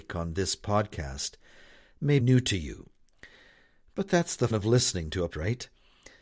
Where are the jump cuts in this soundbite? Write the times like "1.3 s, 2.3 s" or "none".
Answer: 2.2 s, 4.5 s, 5.3 s